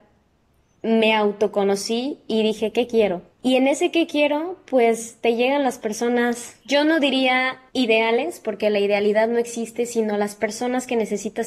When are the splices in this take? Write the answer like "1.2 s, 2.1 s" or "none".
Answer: 3.3 s, 6.6 s, 7.7 s